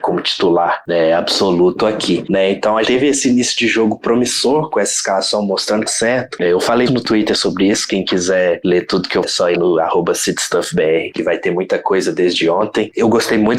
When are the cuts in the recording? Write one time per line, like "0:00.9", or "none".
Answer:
0:02.8
0:05.9
0:06.9
0:09.2
0:09.5